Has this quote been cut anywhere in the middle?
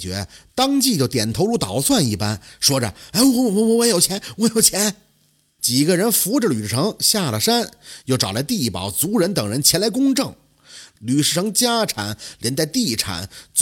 no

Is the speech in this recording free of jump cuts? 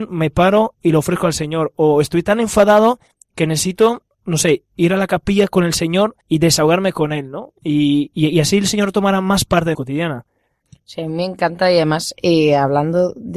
no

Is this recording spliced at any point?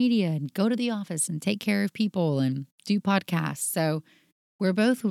yes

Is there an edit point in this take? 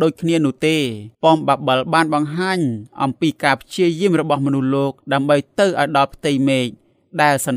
yes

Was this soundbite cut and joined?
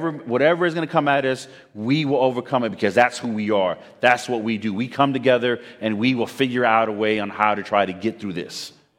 no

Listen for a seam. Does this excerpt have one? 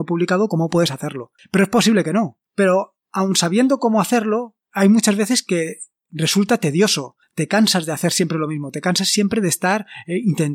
no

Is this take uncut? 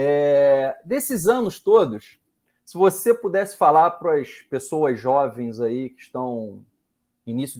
yes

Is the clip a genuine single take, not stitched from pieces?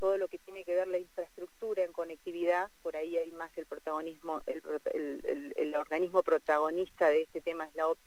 yes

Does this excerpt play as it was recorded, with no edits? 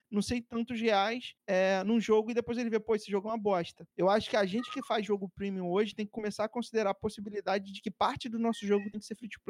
no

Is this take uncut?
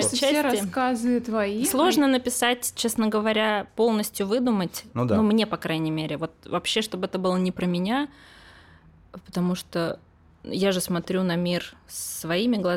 yes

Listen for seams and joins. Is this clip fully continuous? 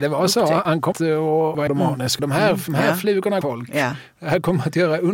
no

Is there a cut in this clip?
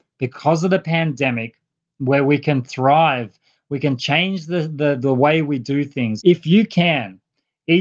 yes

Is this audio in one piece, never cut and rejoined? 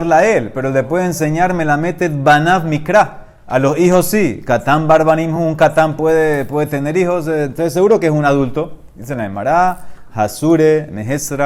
yes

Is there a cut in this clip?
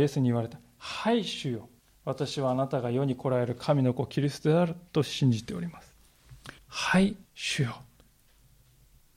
yes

